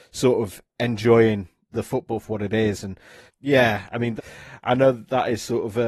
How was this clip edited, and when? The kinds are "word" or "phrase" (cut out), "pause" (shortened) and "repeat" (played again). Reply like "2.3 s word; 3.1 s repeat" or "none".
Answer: 1.7 s word; 3.3 s word; 4.2 s word